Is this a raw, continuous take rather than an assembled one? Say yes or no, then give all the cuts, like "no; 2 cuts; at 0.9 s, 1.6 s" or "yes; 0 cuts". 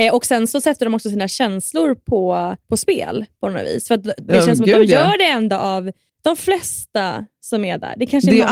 no; 2 cuts; at 2.6 s, 6.1 s